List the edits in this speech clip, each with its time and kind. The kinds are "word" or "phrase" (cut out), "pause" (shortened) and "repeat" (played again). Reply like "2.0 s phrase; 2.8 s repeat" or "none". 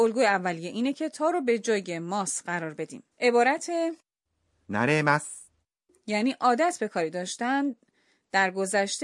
3.1 s pause